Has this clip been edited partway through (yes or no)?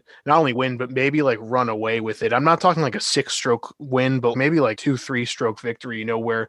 yes